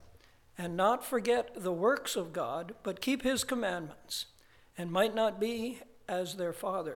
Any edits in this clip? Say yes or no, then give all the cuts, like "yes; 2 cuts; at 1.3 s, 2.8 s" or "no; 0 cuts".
no; 0 cuts